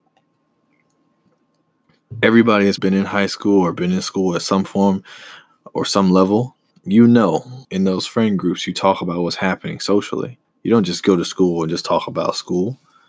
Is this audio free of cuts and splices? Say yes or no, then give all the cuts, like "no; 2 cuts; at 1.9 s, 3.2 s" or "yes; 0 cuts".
no; 4 cuts; at 2.8 s, 6.7 s, 7.6 s, 10.4 s